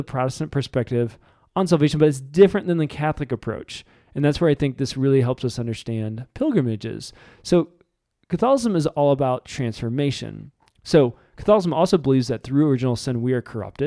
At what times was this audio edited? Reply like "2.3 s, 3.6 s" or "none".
none